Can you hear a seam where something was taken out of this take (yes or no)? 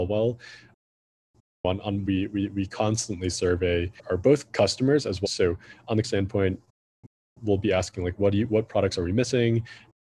yes